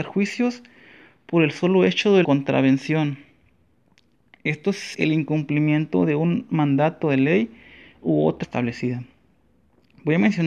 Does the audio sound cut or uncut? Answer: cut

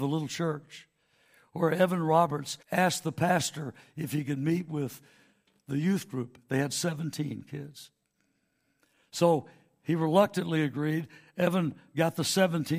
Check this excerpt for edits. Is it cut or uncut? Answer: cut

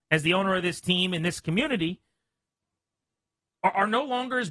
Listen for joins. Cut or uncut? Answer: uncut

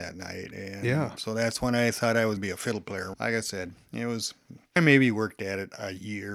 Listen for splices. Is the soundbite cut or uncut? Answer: cut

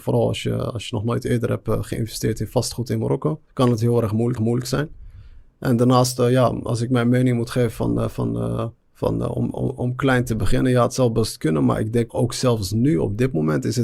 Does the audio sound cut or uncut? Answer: cut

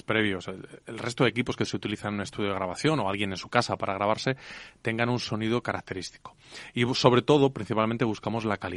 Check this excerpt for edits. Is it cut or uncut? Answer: uncut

